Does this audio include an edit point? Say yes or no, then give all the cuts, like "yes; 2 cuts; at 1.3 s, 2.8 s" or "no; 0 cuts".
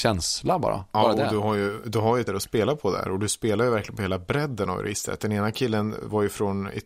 yes; 1 cut; at 2.3 s